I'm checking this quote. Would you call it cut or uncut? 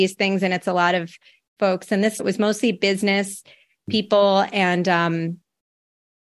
cut